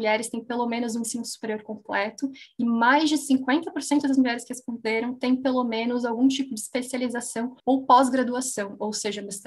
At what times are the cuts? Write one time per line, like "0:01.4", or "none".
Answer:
0:07.6